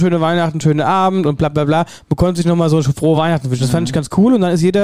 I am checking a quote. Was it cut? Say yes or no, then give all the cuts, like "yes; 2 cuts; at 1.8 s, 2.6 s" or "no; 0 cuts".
no; 0 cuts